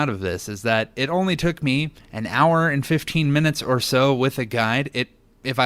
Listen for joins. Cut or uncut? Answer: uncut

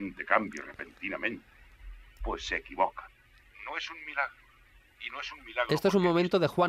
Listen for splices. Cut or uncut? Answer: uncut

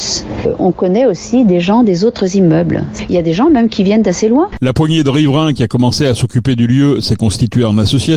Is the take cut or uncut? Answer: uncut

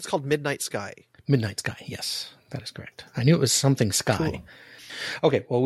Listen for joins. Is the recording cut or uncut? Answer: uncut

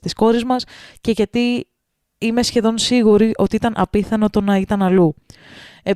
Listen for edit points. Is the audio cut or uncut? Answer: uncut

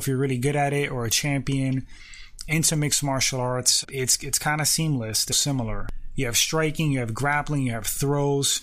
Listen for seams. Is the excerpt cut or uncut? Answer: cut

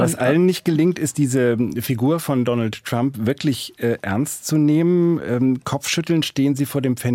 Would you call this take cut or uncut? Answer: uncut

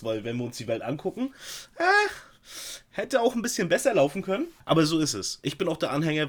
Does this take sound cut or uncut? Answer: cut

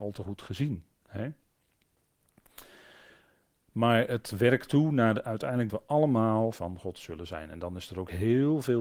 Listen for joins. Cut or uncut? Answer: cut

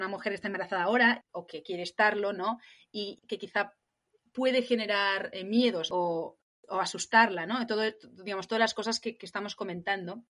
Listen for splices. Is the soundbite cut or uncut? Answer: uncut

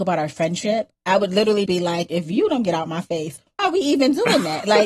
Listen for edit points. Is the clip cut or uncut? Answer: cut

